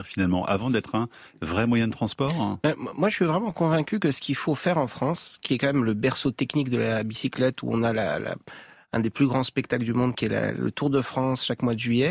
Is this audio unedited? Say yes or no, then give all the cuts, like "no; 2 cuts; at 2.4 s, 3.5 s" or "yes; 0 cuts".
yes; 0 cuts